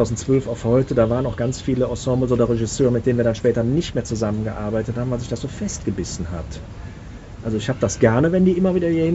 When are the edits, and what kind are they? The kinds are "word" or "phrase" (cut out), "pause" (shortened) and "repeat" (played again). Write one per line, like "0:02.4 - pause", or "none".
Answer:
none